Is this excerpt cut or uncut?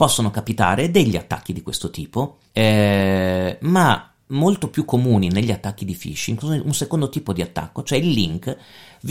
cut